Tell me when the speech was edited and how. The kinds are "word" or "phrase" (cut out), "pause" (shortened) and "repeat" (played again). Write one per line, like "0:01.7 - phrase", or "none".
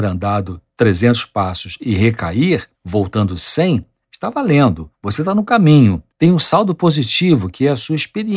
0:02.7 - pause
0:04.9 - pause
0:06.1 - pause